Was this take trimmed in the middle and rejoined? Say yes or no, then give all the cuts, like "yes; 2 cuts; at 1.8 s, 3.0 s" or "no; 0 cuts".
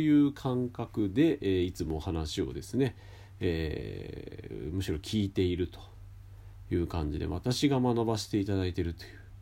no; 0 cuts